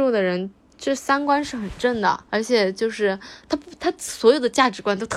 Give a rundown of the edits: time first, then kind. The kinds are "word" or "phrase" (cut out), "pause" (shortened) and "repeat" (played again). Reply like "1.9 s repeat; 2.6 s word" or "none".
2.3 s pause